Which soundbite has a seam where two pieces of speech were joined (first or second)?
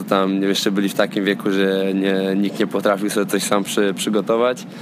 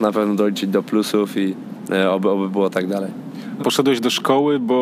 second